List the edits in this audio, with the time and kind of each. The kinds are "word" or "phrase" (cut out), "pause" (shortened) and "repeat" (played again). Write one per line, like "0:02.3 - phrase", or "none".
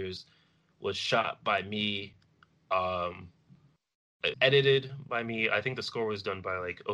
0:04.3 - word